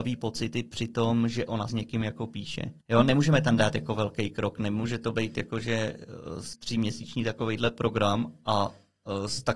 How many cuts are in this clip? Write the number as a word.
three